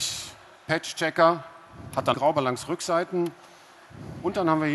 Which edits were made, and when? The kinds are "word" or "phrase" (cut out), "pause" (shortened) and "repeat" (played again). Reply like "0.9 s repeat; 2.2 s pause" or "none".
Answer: 2.1 s phrase